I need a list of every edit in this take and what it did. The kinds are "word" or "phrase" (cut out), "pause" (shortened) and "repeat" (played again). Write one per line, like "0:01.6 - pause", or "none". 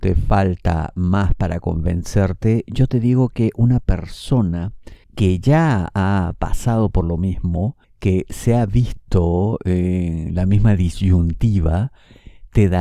0:05.0 - pause
0:07.8 - pause